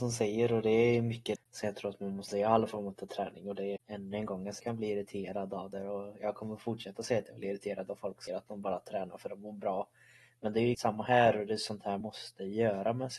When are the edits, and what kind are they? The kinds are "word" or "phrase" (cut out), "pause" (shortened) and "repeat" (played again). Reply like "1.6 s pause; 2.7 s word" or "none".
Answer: 1.4 s word; 2.3 s word; 3.8 s word; 4.6 s word; 8.3 s word; 10.7 s word; 12.0 s word